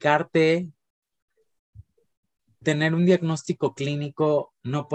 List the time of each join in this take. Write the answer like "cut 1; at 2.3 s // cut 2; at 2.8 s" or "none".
cut 1; at 2.6 s